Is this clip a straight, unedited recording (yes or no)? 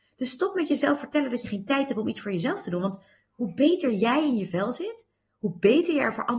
yes